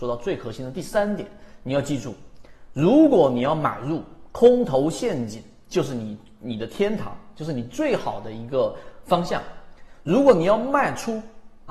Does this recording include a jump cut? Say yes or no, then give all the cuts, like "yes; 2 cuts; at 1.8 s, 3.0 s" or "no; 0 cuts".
no; 0 cuts